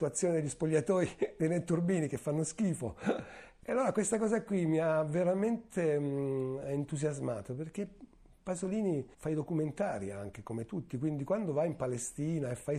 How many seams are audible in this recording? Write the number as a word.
one